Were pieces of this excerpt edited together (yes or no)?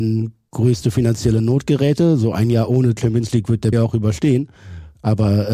yes